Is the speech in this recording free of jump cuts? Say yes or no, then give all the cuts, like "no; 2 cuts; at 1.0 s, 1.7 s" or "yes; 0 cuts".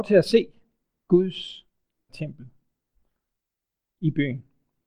no; 1 cut; at 2.1 s